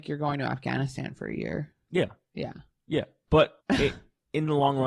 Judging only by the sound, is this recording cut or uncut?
cut